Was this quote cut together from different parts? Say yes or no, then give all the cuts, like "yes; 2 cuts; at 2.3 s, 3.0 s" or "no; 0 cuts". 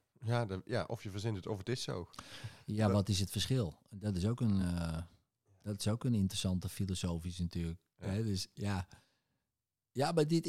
no; 0 cuts